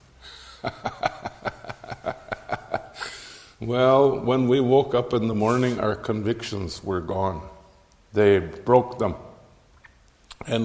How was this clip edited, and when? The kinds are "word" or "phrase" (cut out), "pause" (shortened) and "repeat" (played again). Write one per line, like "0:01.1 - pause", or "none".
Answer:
none

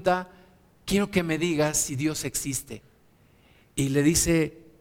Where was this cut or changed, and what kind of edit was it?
none

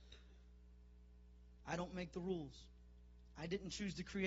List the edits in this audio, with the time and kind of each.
none

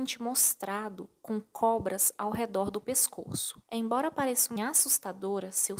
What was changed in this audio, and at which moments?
0:03.6 - pause
0:04.6 - word

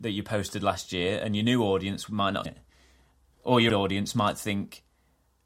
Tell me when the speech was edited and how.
0:02.5 - word
0:03.7 - word

